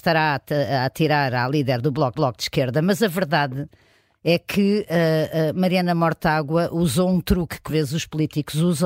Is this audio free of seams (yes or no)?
no